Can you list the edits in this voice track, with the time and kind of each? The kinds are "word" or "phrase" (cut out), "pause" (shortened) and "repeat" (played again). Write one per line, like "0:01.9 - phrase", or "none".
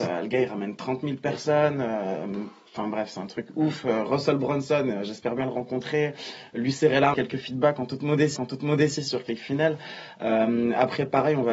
0:07.1 - phrase
0:08.4 - repeat